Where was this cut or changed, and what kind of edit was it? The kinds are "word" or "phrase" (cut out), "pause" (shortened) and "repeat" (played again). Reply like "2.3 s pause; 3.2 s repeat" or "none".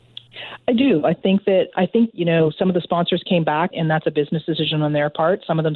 1.7 s word; 2.1 s word; 3.7 s word